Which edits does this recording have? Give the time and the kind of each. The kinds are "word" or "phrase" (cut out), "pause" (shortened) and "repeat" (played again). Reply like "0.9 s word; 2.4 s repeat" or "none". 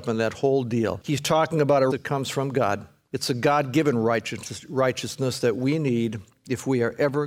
1.9 s word